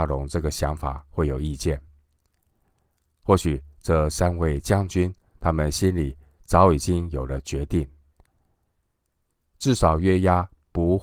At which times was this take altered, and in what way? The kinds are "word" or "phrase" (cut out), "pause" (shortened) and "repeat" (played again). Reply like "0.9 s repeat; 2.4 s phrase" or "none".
none